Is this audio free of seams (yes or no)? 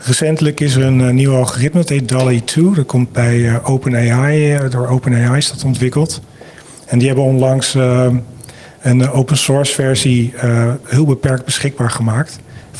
yes